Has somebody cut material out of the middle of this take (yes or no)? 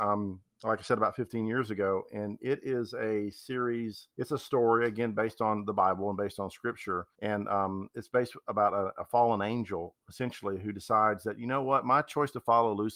yes